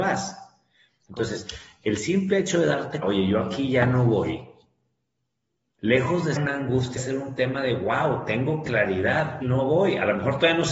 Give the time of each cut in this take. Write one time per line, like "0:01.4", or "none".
0:03.0
0:06.4
0:07.0
0:09.4